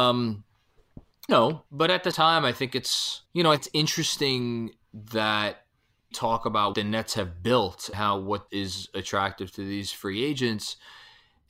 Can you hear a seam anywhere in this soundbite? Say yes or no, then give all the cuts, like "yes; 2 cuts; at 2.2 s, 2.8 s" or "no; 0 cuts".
yes; 9 cuts; at 1.3 s, 1.7 s, 2.1 s, 3.3 s, 3.6 s, 6.1 s, 6.7 s, 7.9 s, 8.5 s